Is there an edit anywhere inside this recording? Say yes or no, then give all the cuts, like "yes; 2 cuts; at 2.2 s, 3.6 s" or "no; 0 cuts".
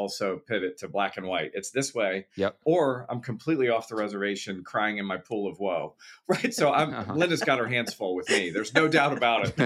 no; 0 cuts